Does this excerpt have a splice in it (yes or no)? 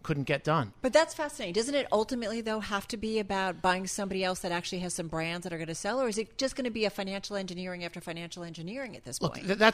no